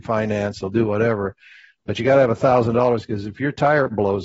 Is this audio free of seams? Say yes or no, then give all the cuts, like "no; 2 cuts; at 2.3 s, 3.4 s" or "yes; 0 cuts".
yes; 0 cuts